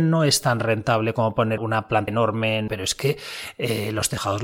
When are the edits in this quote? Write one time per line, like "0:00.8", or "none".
0:01.6
0:02.1
0:02.7